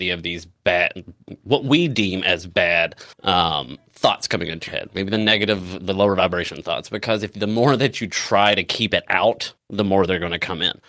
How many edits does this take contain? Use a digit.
3